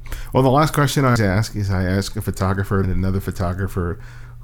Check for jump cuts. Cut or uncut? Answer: cut